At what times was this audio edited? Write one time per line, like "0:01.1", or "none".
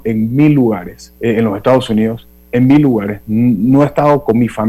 0:01.2

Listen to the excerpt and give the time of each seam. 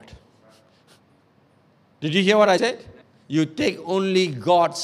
0:02.6
0:03.0

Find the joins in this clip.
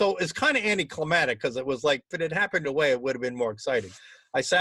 0:02.1
0:02.6

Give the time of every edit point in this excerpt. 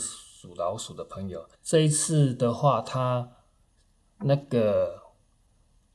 0:01.5

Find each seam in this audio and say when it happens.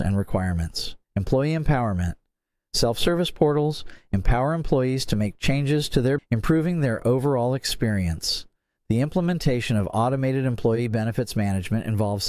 0:01.0
0:06.2

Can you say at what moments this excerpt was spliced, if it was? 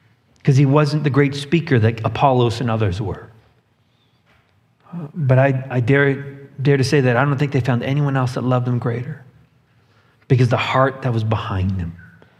none

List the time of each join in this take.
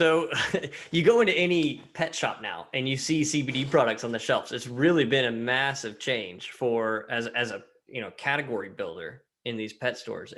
none

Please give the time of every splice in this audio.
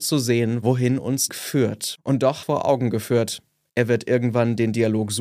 0:01.3
0:02.4

